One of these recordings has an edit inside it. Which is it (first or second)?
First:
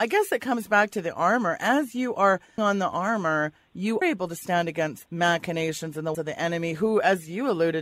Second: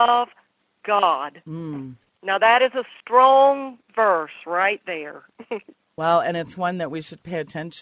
first